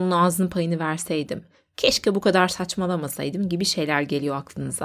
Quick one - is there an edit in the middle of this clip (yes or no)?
no